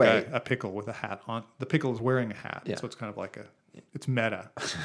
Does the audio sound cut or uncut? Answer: uncut